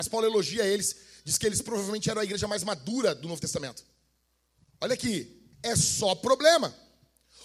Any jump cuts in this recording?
yes; 1 cut; at 5.5 s

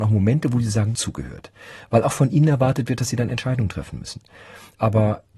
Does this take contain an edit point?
yes; 1 cut; at 0.9 s

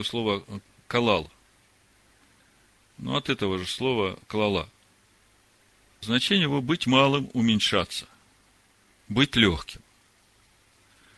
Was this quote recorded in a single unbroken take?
yes; 0 cuts

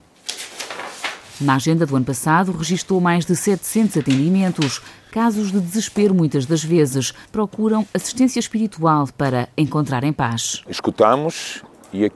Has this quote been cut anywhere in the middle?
yes; 1 cut; at 7.3 s

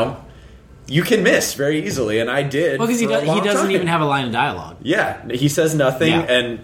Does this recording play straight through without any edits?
yes; 0 cuts

